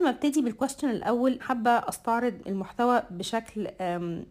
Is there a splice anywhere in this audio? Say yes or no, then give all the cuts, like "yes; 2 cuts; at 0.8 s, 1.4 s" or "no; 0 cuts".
yes; 1 cut; at 1.4 s